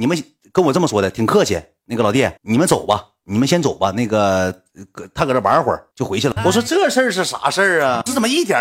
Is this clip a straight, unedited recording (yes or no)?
no